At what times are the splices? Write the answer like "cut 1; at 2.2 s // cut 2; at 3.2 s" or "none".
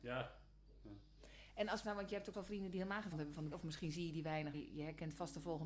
cut 1; at 1.8 s // cut 2; at 2.3 s // cut 3; at 3.1 s // cut 4; at 3.5 s // cut 5; at 4.5 s